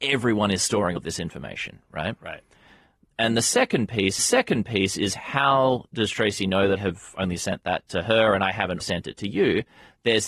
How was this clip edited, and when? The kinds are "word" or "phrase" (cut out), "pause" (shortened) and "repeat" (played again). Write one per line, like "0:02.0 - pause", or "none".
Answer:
0:01.0 - word
0:04.2 - repeat
0:06.8 - word
0:08.8 - word